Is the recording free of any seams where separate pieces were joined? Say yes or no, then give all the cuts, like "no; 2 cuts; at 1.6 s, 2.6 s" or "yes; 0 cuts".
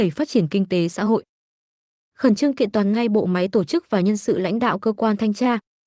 yes; 0 cuts